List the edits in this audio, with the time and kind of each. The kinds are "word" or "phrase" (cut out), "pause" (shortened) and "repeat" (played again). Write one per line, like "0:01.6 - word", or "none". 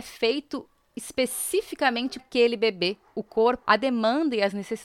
0:02.2 - word
0:03.6 - word